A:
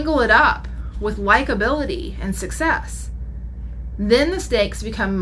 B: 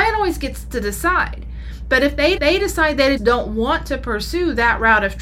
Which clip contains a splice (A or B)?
B